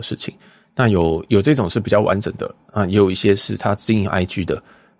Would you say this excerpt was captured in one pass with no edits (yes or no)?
yes